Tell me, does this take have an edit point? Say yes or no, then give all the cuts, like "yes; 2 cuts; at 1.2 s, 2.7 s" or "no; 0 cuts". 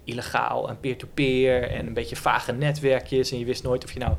no; 0 cuts